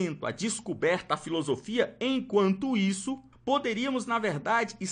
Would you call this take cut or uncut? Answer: cut